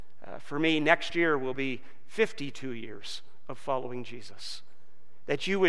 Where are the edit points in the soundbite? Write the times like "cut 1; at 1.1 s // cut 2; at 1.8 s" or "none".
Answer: none